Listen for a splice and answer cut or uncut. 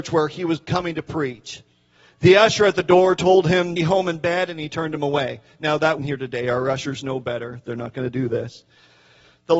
cut